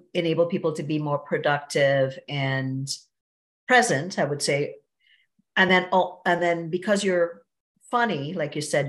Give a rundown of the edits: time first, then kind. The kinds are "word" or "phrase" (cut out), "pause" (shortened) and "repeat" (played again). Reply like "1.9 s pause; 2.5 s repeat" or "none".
none